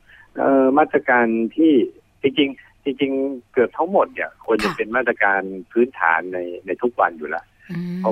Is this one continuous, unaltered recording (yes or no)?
yes